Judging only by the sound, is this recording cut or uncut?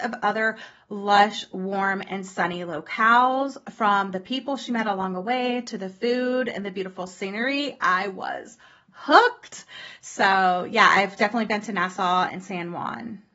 uncut